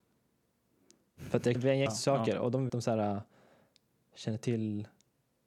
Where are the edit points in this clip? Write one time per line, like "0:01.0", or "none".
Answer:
0:01.5
0:01.9
0:02.7